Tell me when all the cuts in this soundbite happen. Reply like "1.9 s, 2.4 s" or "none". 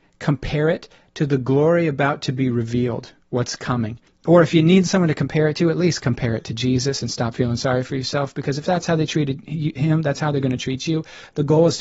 3.2 s, 4.1 s